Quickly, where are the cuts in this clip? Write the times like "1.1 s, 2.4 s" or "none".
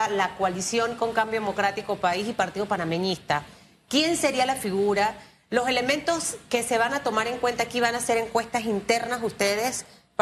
none